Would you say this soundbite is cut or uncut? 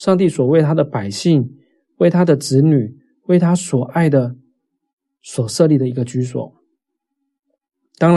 uncut